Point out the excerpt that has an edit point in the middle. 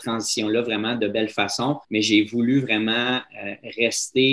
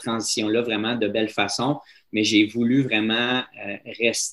first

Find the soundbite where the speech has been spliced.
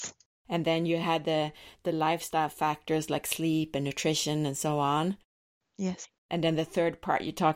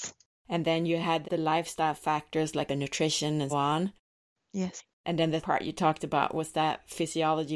second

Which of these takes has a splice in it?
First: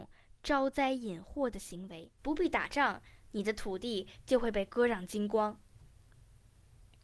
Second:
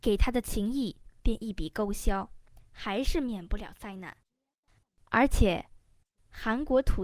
first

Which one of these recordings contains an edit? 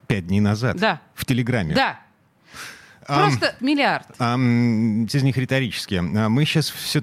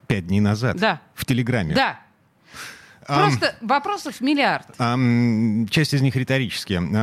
first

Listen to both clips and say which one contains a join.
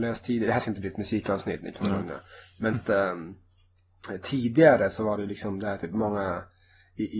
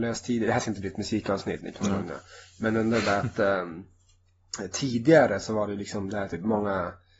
first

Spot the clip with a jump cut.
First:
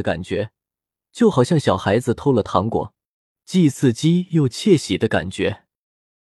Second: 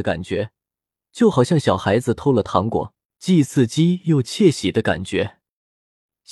second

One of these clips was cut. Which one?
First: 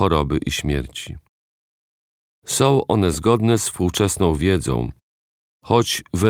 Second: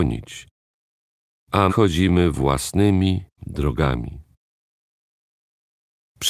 second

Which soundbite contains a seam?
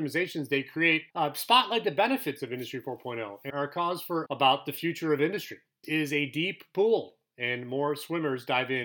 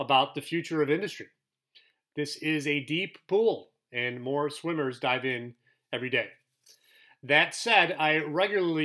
first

